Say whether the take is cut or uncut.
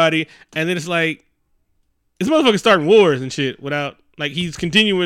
uncut